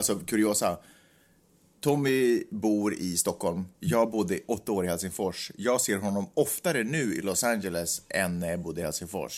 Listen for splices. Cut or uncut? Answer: cut